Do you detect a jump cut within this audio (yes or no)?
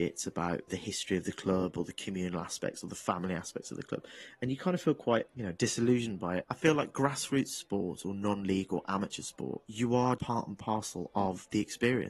yes